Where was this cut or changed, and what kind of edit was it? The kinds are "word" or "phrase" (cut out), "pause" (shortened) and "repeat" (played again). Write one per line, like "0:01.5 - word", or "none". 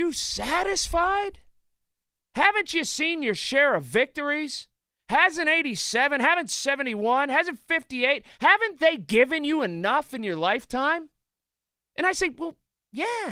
none